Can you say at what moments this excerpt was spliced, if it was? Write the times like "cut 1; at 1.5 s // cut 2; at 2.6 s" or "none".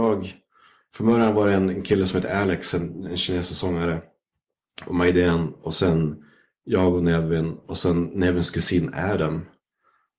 none